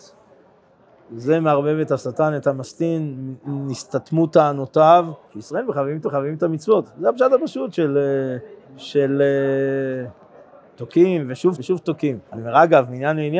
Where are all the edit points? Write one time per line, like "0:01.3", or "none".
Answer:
0:05.2
0:06.0
0:08.6
0:11.6
0:12.3